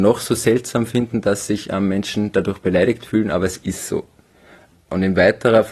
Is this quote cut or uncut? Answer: uncut